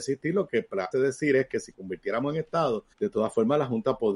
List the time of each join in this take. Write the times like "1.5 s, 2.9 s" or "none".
0.9 s, 1.7 s, 2.9 s